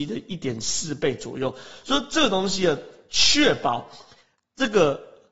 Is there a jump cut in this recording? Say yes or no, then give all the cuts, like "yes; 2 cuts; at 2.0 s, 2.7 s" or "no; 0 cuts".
no; 0 cuts